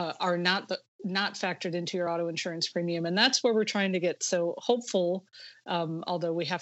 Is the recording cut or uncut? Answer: uncut